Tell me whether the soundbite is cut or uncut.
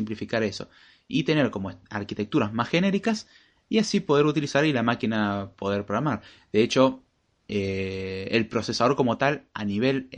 uncut